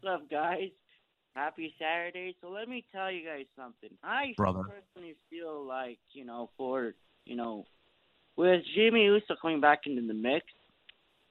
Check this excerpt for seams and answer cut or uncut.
cut